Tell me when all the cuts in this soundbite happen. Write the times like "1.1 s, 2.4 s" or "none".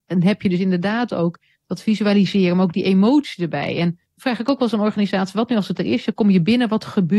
4.1 s

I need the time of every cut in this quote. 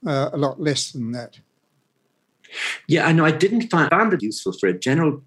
3.9 s, 4.2 s

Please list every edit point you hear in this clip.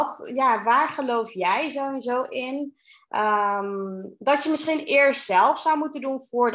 none

